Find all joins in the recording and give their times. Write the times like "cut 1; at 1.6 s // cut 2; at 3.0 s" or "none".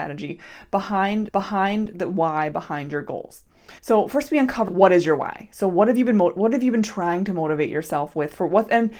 cut 1; at 1.3 s // cut 2; at 3.8 s // cut 3; at 4.7 s